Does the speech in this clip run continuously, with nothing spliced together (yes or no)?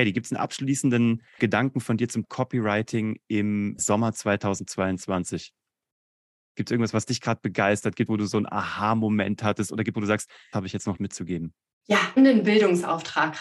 no